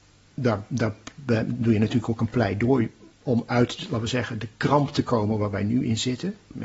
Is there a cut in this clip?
no; 0 cuts

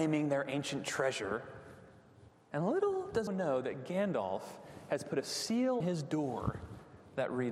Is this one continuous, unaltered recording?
no; 2 cuts; at 3.3 s, 5.8 s

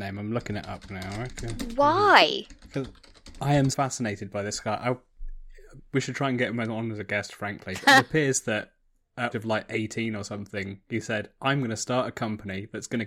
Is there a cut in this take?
yes; 3 cuts; at 3.7 s, 7.8 s, 9.3 s

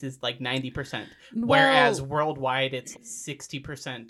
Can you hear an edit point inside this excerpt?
yes; 1 cut; at 2.9 s

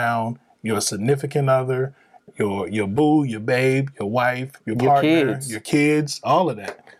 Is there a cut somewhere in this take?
no; 0 cuts

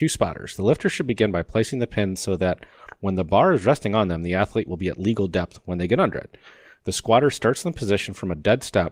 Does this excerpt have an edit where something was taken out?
no; 0 cuts

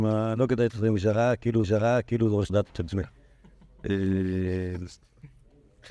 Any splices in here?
yes; 2 cuts; at 1.6 s, 2.5 s

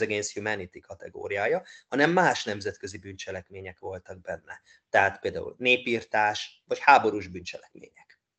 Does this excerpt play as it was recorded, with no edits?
yes; 0 cuts

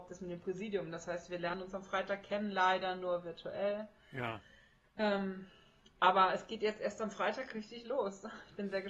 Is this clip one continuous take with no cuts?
yes; 0 cuts

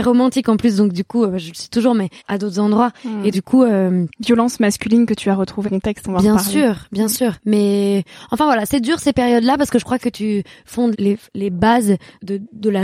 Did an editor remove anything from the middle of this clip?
yes; 6 cuts; at 2.2 s, 3.3 s, 5.6 s, 7.4 s, 10.0 s, 10.9 s

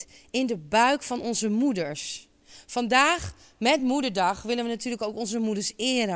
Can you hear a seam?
no; 0 cuts

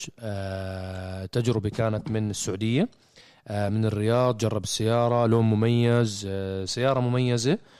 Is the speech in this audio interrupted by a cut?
no; 0 cuts

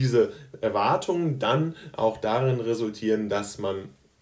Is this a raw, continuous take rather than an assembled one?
yes; 0 cuts

